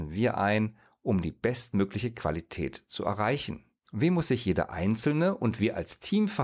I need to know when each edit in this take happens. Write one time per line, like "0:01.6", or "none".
0:03.8